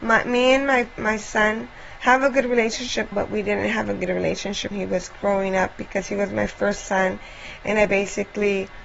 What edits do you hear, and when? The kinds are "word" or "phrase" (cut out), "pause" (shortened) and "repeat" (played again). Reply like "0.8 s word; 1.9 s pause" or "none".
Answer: 3.1 s word; 4.7 s word